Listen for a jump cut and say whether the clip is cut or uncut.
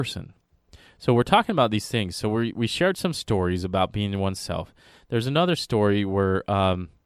uncut